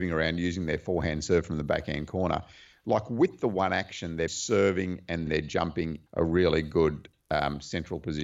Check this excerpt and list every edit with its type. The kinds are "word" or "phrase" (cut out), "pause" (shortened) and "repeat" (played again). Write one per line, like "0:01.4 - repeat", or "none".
0:04.3 - word
0:05.3 - word
0:06.1 - word